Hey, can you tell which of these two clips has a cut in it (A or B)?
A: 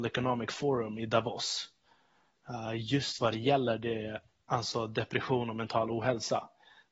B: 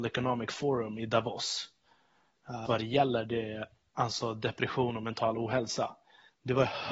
B